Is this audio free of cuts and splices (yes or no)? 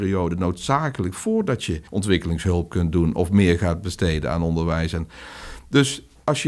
no